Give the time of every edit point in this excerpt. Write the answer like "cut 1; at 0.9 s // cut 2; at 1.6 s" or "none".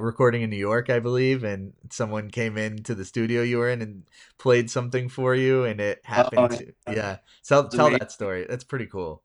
none